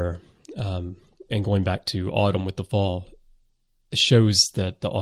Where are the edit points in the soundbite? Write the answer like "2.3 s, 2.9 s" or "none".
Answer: 1.3 s